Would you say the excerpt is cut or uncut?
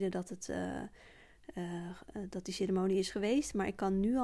uncut